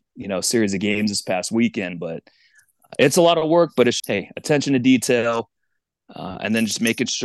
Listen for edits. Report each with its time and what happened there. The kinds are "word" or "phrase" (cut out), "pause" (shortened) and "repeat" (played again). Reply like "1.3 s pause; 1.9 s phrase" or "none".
4.0 s word